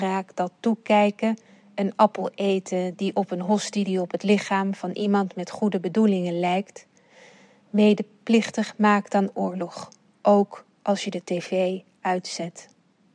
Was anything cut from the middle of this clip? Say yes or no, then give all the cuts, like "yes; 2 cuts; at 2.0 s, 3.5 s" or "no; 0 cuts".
no; 0 cuts